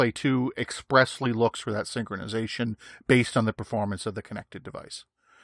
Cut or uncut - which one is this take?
uncut